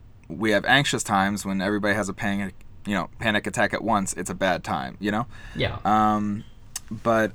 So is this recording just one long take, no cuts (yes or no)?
yes